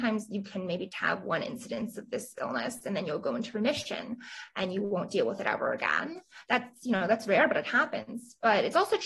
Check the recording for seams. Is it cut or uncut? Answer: cut